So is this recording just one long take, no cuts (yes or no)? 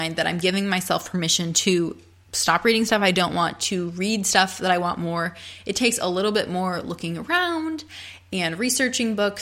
yes